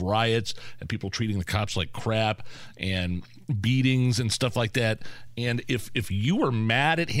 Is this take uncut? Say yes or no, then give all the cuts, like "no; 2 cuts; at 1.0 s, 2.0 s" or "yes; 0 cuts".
yes; 0 cuts